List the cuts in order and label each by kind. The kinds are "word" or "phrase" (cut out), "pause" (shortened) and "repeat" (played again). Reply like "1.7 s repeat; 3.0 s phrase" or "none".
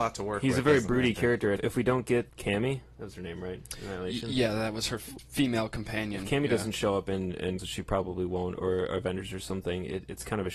1.6 s word; 2.3 s word; 5.2 s word; 7.6 s word